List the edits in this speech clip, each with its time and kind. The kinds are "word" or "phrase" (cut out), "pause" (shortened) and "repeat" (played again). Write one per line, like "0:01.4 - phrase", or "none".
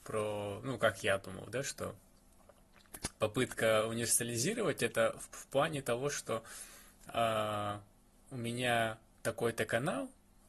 none